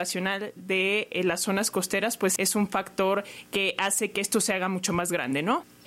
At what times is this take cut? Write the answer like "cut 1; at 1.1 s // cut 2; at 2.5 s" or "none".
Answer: cut 1; at 2.4 s